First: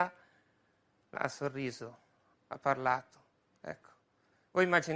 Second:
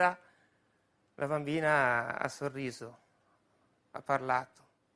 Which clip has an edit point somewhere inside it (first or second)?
first